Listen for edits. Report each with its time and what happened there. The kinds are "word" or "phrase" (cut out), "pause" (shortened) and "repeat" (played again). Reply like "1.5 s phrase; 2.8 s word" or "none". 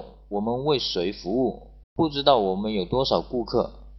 1.8 s pause